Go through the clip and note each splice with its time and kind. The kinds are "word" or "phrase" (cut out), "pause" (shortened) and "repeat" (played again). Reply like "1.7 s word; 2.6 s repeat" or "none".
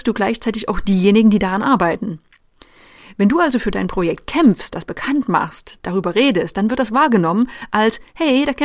none